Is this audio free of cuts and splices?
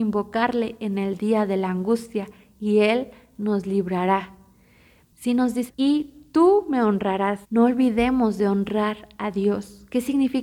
no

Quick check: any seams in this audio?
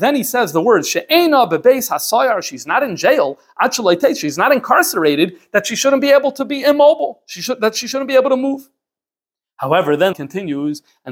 yes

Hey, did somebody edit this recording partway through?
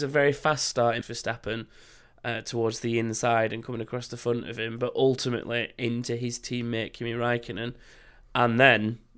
yes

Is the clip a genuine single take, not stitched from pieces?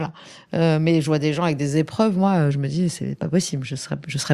yes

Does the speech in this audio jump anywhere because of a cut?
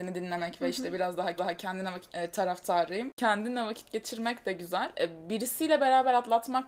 yes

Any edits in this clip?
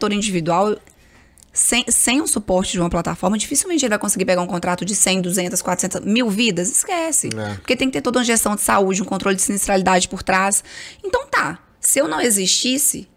no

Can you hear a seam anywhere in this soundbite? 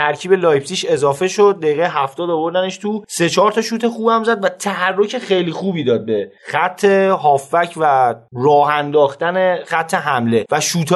no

